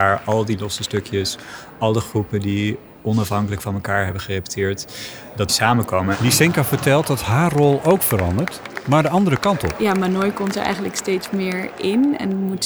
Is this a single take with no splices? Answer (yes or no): no